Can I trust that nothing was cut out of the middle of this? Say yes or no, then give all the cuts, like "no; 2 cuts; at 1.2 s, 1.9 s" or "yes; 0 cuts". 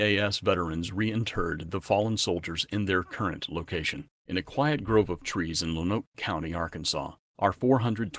no; 1 cut; at 4.2 s